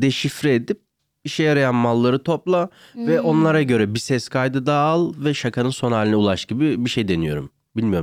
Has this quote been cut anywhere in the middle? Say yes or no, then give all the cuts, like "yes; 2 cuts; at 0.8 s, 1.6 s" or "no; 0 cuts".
no; 0 cuts